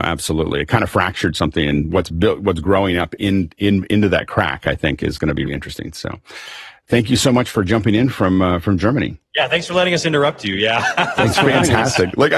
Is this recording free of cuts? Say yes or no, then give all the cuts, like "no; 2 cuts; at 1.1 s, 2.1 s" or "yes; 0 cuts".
no; 2 cuts; at 5.5 s, 9.3 s